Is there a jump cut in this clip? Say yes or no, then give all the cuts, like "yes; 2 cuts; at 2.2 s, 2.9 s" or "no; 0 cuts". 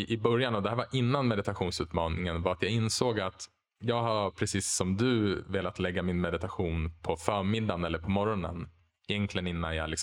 no; 0 cuts